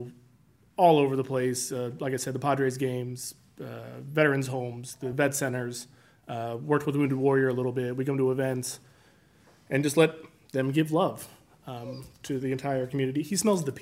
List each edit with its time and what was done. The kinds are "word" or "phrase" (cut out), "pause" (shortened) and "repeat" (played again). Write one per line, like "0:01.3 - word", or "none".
none